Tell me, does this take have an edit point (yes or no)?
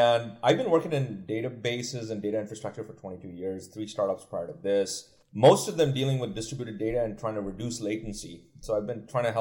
yes